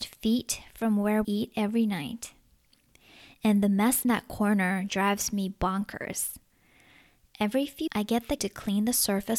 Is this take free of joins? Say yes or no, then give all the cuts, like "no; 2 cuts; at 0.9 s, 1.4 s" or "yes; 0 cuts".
no; 5 cuts; at 1.2 s, 4.0 s, 4.9 s, 7.9 s, 8.4 s